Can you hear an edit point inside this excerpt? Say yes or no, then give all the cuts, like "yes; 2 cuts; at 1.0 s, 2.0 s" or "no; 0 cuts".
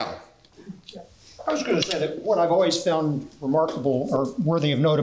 no; 0 cuts